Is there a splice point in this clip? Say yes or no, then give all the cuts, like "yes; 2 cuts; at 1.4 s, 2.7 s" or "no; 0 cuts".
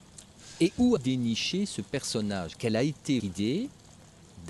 yes; 3 cuts; at 1.0 s, 2.6 s, 3.2 s